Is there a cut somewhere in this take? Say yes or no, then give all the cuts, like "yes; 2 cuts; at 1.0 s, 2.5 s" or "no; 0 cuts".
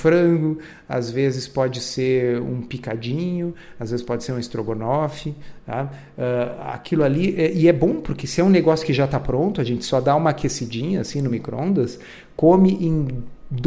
no; 0 cuts